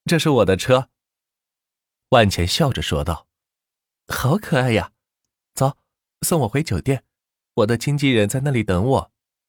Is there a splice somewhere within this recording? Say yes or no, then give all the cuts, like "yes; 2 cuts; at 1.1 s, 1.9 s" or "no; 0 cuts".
no; 0 cuts